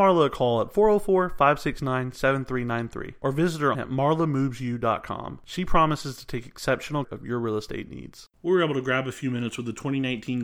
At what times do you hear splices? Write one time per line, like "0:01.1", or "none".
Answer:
0:03.7
0:07.0
0:08.4